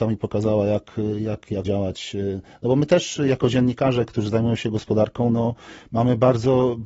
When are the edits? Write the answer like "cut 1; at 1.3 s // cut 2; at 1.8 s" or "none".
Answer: cut 1; at 1.6 s